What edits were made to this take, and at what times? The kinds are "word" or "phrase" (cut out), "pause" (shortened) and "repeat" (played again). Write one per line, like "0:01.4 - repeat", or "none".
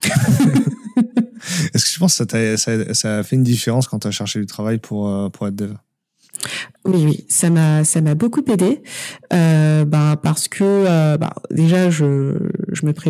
0:06.8 - word